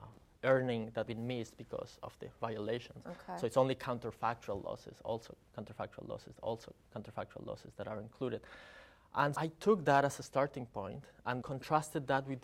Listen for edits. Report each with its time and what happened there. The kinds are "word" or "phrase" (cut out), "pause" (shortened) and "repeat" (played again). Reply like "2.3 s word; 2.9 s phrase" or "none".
1.1 s word; 6.4 s repeat; 9.3 s word; 11.4 s word